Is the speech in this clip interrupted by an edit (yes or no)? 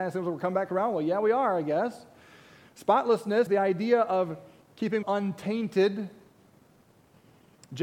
yes